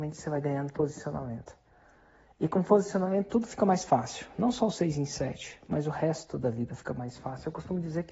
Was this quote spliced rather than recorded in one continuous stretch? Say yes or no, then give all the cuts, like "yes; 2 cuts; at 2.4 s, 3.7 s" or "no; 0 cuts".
no; 0 cuts